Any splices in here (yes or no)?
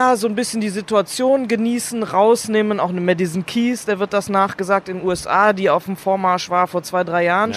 no